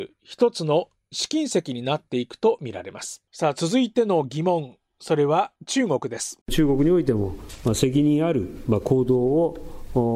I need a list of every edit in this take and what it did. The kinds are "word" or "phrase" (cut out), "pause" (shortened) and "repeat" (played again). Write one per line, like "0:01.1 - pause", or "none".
0:03.3 - pause
0:05.6 - pause
0:06.4 - pause